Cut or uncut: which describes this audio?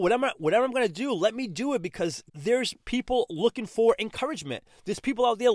uncut